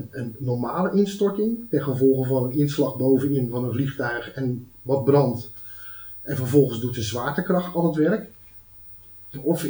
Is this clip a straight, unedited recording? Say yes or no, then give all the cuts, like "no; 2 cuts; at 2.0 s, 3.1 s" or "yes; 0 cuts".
yes; 0 cuts